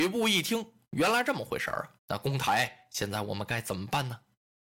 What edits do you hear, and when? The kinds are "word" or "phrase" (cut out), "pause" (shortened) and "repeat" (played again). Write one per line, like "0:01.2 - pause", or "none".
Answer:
0:02.0 - pause

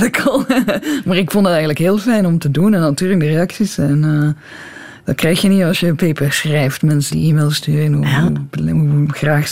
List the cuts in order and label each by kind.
0:07.1 - word

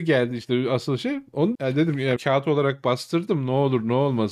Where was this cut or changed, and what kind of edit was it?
0:01.5 - word
0:02.2 - word

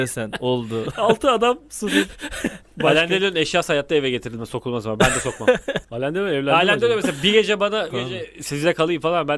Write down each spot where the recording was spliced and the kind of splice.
0:05.8 - pause
0:07.9 - phrase

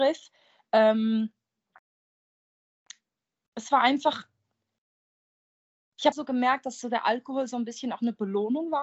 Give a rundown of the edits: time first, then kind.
0:06.1 - word

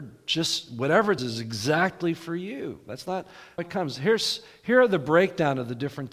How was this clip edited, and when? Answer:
0:01.2 - word
0:03.6 - word

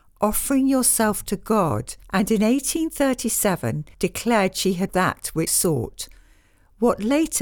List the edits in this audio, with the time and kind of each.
0:02.0 - pause
0:03.9 - pause
0:04.9 - word
0:05.5 - word

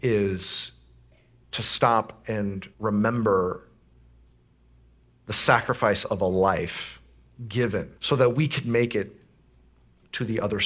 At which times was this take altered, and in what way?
0:02.7 - pause
0:08.0 - pause

